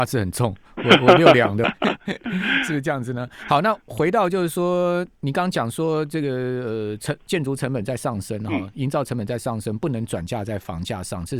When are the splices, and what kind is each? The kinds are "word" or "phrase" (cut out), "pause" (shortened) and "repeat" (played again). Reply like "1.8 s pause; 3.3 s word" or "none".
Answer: 1.6 s phrase; 5.1 s pause